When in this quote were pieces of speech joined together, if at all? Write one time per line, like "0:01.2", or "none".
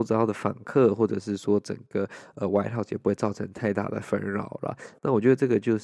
none